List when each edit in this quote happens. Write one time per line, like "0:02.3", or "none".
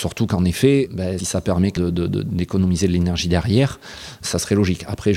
0:01.2
0:01.8

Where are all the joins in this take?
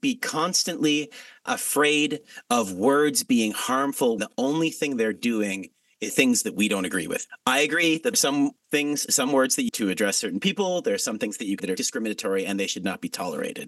0:01.5
0:04.2
0:06.1
0:08.1
0:09.7
0:11.6

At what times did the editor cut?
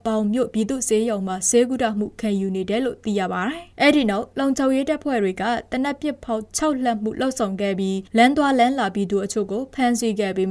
0:03.7
0:08.1

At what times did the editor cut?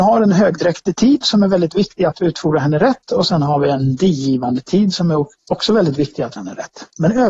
0:06.4

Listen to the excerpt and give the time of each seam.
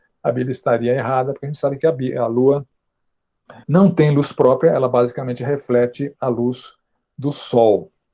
0:03.6

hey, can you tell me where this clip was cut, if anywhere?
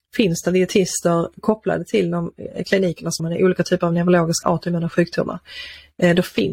0:03.2
0:04.4

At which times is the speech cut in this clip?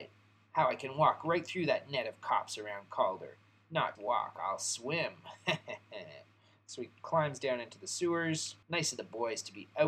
0:04.0
0:08.6

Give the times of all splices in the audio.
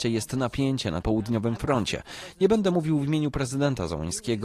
0:01.0

